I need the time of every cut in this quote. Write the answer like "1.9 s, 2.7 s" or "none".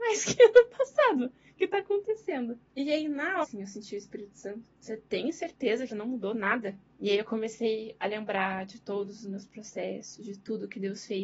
1.6 s, 2.7 s, 3.4 s, 4.8 s, 5.9 s, 6.9 s